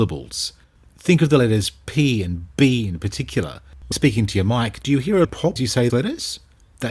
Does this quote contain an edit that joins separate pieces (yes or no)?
yes